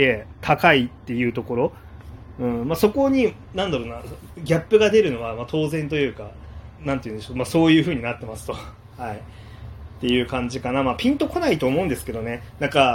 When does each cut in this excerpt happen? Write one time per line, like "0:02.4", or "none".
0:06.8

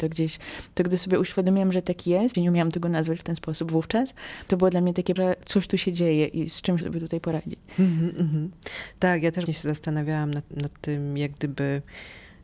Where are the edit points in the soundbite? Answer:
0:02.3
0:04.5
0:05.2
0:06.8
0:09.5
0:10.5

